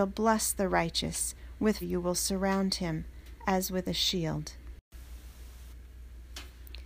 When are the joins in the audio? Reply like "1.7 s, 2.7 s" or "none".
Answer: 1.8 s